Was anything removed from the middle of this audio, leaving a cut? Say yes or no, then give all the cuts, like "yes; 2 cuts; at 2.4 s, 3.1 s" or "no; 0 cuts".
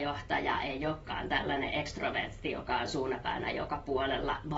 no; 0 cuts